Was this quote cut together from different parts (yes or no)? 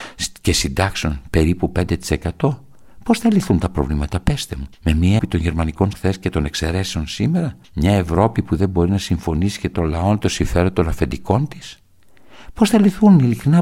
yes